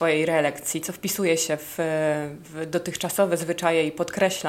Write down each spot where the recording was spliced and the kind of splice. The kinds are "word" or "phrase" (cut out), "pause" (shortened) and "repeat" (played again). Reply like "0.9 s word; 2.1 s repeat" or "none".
none

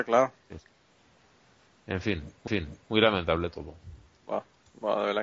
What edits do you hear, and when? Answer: 2.5 s repeat

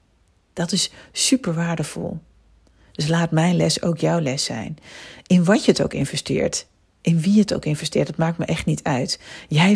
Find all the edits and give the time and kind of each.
none

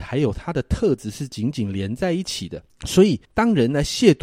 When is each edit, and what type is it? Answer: 2.7 s pause; 3.2 s pause

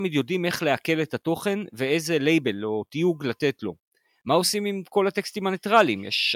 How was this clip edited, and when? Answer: none

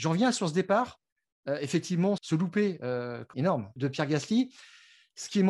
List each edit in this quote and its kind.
2.2 s word; 3.3 s word; 3.8 s word

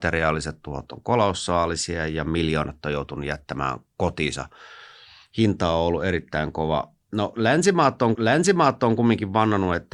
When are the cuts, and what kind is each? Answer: 8.1 s repeat

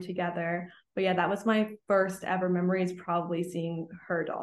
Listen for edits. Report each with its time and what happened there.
none

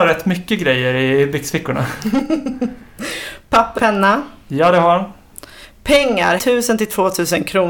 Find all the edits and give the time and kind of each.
3.8 s word; 6.4 s word

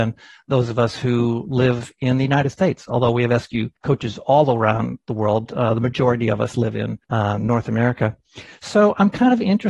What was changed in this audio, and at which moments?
3.8 s pause; 7.0 s pause

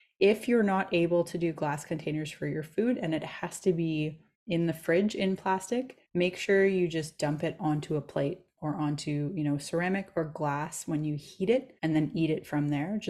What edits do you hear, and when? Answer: 4.3 s pause; 6.0 s pause; 11.8 s pause

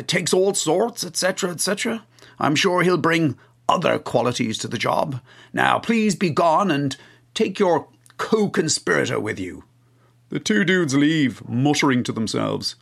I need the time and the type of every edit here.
none

